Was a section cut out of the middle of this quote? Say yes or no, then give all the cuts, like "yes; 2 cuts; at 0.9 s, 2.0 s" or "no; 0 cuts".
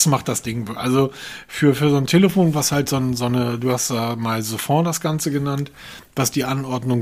no; 0 cuts